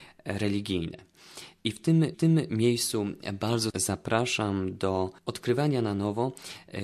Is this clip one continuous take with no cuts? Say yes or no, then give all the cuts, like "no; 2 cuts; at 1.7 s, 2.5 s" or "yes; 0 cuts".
no; 3 cuts; at 2.1 s, 3.7 s, 5.2 s